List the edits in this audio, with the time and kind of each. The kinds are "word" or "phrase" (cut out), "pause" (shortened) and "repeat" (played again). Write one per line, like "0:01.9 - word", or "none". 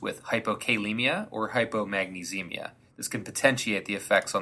none